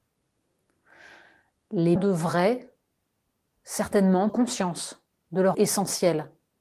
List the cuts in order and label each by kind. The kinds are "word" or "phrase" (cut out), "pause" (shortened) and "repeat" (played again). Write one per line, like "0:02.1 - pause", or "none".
0:02.0 - word
0:04.3 - word
0:05.5 - word